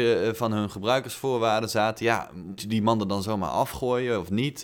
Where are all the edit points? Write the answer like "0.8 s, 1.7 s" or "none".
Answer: 2.6 s